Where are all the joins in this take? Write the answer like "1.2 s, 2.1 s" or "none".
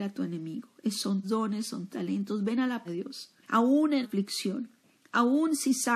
1.2 s, 1.9 s, 2.8 s, 3.4 s, 4.0 s